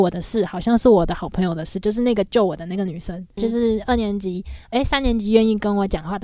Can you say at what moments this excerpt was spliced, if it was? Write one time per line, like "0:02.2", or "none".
0:03.4
0:04.7